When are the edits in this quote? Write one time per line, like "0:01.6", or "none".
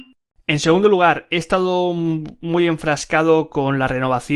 none